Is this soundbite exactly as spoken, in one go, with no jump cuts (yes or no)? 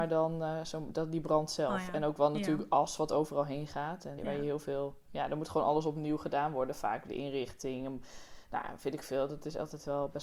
no